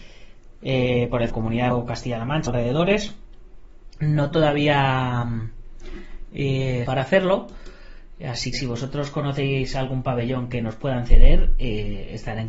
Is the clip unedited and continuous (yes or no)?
no